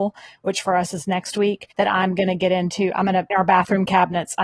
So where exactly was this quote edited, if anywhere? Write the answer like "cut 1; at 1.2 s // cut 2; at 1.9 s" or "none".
cut 1; at 1.7 s // cut 2; at 3.3 s